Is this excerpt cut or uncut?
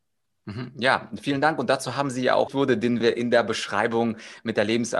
cut